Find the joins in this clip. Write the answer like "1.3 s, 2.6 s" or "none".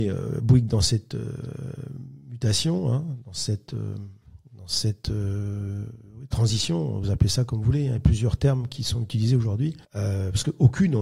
9.8 s